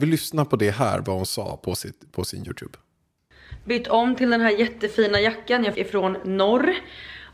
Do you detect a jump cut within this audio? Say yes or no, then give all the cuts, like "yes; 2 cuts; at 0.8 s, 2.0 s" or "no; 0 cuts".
yes; 1 cut; at 5.7 s